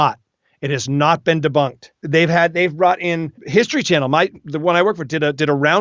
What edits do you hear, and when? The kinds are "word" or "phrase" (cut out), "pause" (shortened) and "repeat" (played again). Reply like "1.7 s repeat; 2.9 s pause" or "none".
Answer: 1.9 s pause; 3.4 s pause